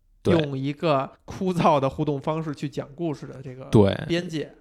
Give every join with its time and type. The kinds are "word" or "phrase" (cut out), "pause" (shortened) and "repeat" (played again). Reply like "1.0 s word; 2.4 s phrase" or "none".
1.2 s pause